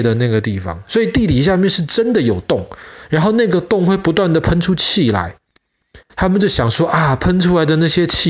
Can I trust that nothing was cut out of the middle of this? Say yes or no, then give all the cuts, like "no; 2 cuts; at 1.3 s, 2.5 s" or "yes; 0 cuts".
no; 1 cut; at 6.1 s